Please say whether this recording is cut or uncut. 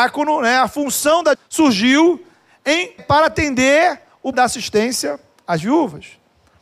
cut